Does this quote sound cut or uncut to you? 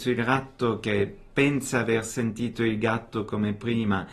uncut